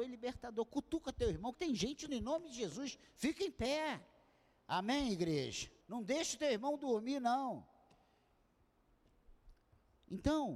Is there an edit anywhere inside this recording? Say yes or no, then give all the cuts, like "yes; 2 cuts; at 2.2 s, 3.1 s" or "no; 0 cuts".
yes; 3 cuts; at 1.5 s, 2.1 s, 5.8 s